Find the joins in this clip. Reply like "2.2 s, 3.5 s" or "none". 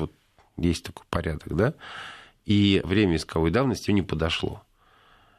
2.8 s, 3.9 s